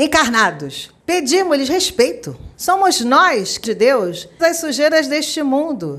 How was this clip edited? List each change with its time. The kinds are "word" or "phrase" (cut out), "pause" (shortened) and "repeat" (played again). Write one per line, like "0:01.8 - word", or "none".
0:01.0 - pause
0:02.5 - pause
0:03.6 - word
0:04.4 - word